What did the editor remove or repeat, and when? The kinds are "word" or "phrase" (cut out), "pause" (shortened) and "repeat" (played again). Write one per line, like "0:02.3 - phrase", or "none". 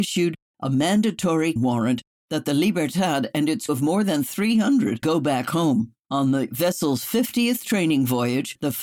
0:01.6 - word
0:03.7 - word
0:05.0 - word